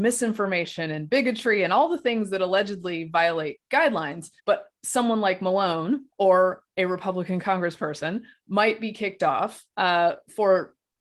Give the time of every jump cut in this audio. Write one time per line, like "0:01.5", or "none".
0:04.4
0:06.1
0:09.7